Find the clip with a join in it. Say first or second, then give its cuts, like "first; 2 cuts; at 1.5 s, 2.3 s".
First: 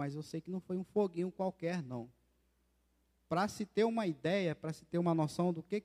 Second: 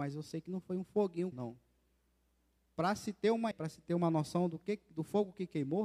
second; 2 cuts; at 1.3 s, 3.5 s